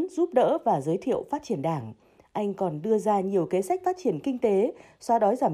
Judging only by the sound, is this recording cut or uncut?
uncut